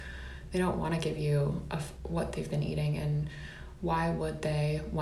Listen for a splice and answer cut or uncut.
cut